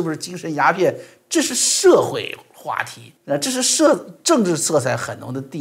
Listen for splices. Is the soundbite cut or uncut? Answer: cut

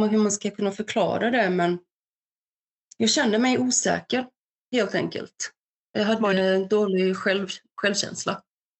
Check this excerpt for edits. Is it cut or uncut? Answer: uncut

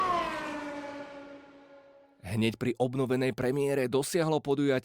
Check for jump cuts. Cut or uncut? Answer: uncut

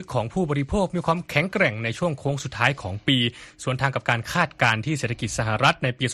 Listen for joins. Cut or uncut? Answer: uncut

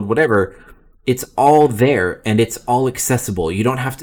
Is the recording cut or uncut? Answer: uncut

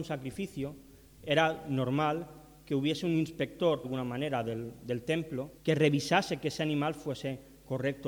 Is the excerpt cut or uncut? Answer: cut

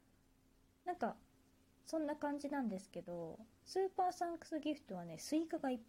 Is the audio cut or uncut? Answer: uncut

